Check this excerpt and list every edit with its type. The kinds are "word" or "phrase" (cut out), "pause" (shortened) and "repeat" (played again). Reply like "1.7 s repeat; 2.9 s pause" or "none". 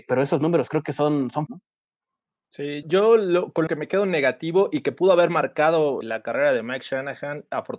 1.5 s word; 2.8 s word; 3.7 s word; 6.0 s word